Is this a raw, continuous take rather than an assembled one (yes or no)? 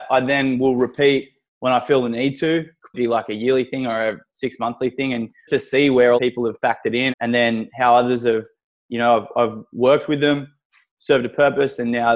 no